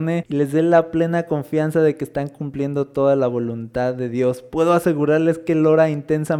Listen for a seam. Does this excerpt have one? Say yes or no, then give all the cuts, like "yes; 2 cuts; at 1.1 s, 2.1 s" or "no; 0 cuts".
no; 0 cuts